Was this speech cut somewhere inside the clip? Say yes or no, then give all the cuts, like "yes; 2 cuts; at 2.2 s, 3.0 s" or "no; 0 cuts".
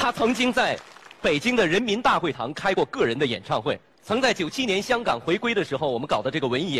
no; 0 cuts